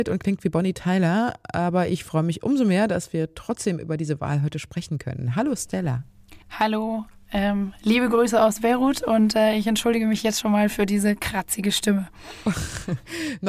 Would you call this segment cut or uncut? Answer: cut